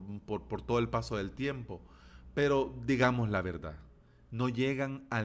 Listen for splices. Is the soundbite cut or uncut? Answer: uncut